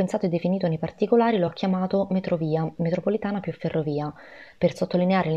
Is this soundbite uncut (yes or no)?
yes